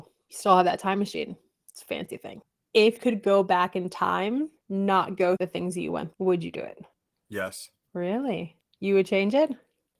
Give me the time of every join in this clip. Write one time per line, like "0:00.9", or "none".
0:03.0
0:04.6
0:05.4
0:06.1